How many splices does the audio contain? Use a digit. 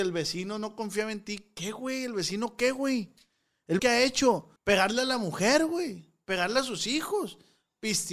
2